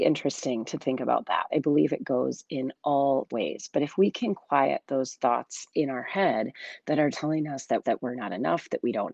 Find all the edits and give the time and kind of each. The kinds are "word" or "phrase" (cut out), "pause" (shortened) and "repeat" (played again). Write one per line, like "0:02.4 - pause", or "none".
0:01.5 - word
0:03.3 - word
0:07.1 - word
0:07.8 - repeat